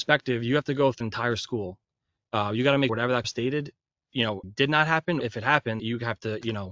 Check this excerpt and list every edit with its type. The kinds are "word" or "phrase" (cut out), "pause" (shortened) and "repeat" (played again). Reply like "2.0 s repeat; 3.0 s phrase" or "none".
1.0 s word; 2.9 s word; 3.2 s word; 4.4 s word; 5.2 s word; 5.8 s word